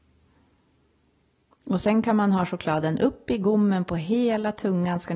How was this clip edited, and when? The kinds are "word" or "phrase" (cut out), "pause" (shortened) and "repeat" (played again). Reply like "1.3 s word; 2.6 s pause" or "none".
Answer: none